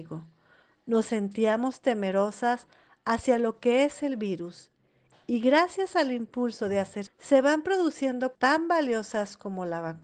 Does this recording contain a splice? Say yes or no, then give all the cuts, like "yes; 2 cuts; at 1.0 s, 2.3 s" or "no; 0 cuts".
yes; 2 cuts; at 7.1 s, 8.3 s